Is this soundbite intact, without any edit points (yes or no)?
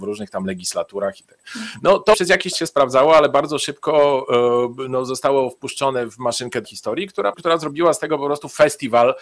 no